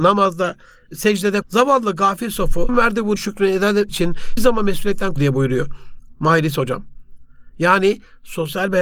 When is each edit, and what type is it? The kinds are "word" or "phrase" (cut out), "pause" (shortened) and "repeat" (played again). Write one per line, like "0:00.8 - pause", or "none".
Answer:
0:01.4 - word
0:02.7 - word
0:03.2 - word
0:03.9 - word
0:04.4 - word
0:05.2 - word